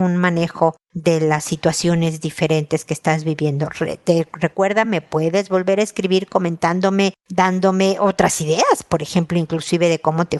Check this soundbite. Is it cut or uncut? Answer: uncut